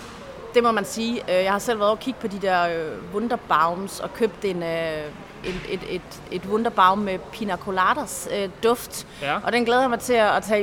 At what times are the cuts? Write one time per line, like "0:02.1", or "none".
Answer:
none